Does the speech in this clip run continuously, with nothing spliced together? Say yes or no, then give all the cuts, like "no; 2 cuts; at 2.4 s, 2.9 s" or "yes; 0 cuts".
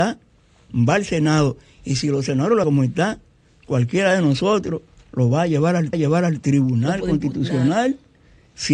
no; 2 cuts; at 2.6 s, 5.9 s